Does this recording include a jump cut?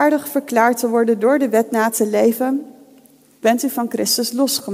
no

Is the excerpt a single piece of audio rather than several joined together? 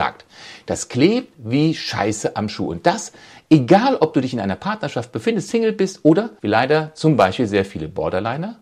no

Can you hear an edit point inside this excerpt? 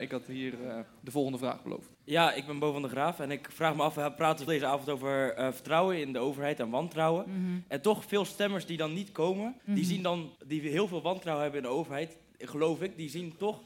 yes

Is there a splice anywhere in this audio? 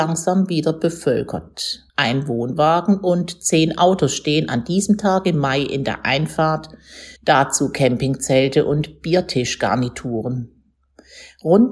yes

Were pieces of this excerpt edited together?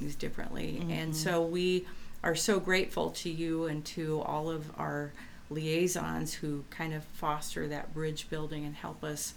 no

